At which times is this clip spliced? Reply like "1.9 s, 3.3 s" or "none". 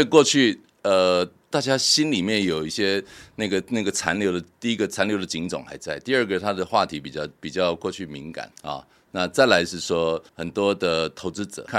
8.5 s, 10.3 s